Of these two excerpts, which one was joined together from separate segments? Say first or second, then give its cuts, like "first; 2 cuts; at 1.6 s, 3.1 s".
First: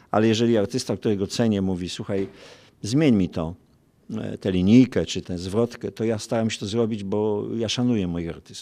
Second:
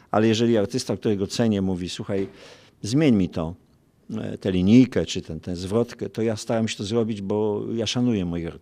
first; 1 cut; at 5.2 s